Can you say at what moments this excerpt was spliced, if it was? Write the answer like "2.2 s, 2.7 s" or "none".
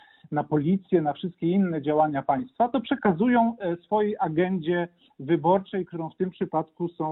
none